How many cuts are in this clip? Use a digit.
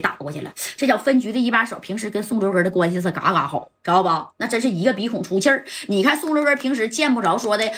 1